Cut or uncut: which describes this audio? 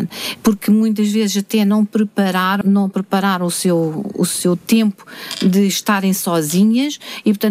cut